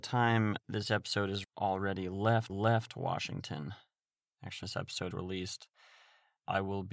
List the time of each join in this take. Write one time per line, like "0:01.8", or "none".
0:01.4
0:02.5
0:04.6
0:05.1